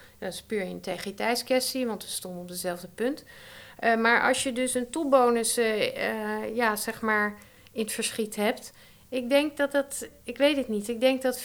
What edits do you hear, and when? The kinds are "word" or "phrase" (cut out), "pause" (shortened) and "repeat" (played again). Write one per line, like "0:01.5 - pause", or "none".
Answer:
none

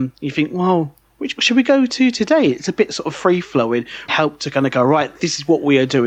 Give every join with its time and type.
0:01.4 - word
0:04.1 - phrase

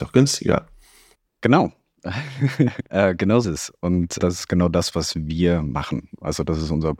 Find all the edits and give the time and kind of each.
0:02.9 - pause
0:03.4 - word
0:04.2 - word

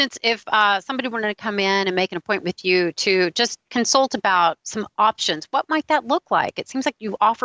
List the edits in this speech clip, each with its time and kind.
0:03.7 - pause
0:04.6 - word

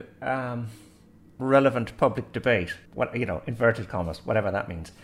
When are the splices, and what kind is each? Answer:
0:01.4 - word
0:02.9 - pause

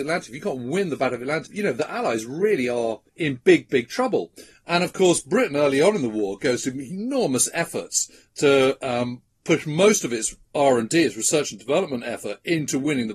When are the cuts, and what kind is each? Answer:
0:01.5 - word
0:03.1 - pause

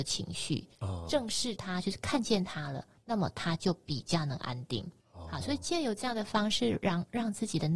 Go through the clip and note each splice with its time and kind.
0:05.0 - pause

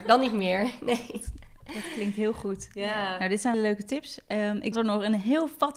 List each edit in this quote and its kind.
0:03.5 - word
0:04.7 - phrase

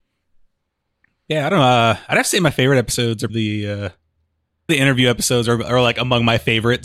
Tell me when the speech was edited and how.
0:03.3 - word
0:04.7 - word

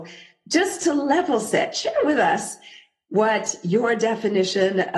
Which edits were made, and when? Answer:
none

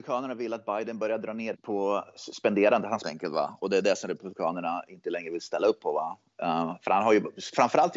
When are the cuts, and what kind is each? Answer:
0:01.5 - word
0:03.0 - phrase

